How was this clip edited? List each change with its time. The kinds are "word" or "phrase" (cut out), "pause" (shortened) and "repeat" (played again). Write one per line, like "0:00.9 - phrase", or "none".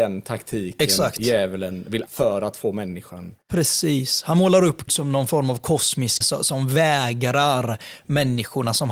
0:02.1 - word
0:04.9 - word
0:06.2 - word